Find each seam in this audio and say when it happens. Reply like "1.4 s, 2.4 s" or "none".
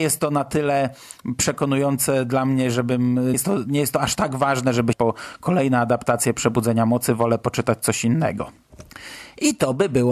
3.3 s, 4.9 s